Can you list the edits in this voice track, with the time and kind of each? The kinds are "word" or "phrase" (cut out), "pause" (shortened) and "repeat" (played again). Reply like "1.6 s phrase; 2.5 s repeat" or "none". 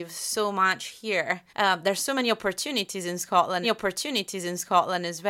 1.5 s pause; 3.6 s repeat